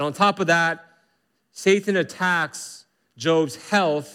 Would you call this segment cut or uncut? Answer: uncut